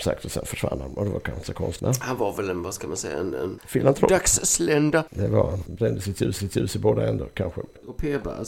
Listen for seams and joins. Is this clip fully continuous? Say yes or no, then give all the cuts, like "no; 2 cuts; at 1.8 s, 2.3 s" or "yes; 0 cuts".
no; 1 cut; at 6.4 s